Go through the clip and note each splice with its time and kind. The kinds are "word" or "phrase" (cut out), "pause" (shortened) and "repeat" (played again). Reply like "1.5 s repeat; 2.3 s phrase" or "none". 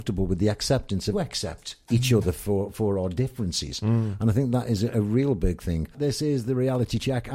1.1 s phrase